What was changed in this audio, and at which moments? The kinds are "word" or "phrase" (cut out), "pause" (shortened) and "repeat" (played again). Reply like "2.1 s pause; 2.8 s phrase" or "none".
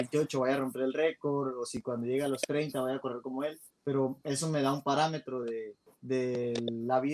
none